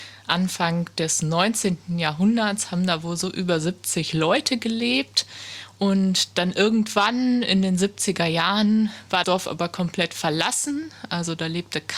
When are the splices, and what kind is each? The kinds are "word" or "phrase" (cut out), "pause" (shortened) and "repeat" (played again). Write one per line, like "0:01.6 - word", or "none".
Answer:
0:09.2 - word